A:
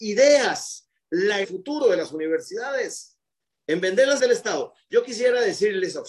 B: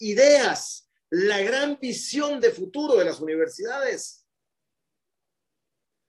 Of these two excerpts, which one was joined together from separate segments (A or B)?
A